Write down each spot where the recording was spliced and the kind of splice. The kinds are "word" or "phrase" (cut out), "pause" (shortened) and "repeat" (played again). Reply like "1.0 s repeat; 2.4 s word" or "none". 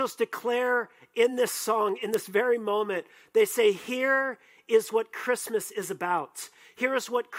none